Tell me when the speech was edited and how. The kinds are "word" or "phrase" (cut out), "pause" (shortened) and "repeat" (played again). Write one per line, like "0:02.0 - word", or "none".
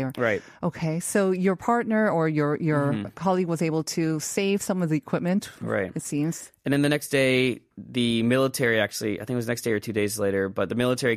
none